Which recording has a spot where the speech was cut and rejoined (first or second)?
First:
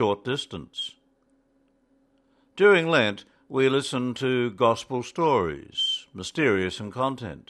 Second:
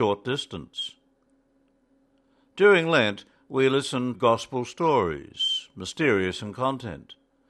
second